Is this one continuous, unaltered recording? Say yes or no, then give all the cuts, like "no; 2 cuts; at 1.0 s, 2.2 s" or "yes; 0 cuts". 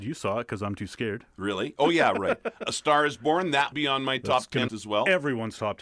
no; 3 cuts; at 2.7 s, 3.7 s, 4.7 s